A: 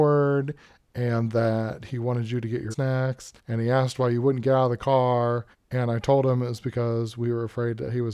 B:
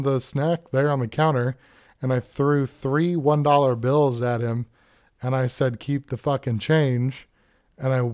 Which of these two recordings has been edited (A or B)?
A